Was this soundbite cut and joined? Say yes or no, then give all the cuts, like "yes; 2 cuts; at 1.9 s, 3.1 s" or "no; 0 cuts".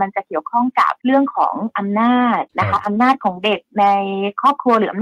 yes; 2 cuts; at 1.0 s, 2.5 s